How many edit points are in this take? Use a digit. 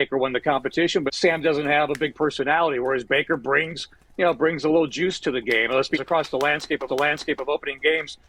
3